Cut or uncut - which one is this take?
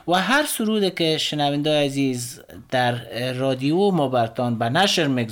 uncut